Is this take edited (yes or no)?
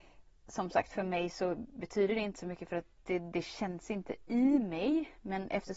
no